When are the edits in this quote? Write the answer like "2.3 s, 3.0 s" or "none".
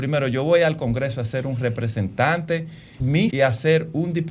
3.0 s, 3.3 s

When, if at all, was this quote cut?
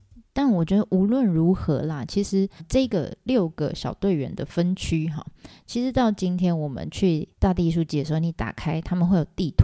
2.6 s, 7.3 s

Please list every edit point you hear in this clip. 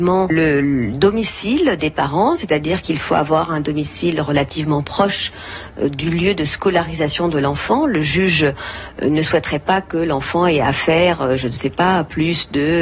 none

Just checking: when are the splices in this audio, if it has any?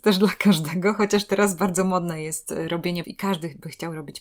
3.0 s

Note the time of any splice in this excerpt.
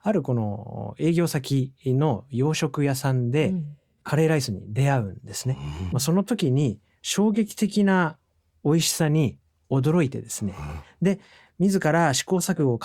5.9 s

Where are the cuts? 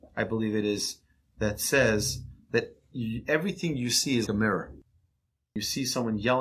4.3 s

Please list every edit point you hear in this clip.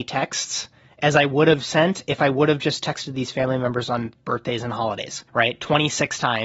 5.3 s

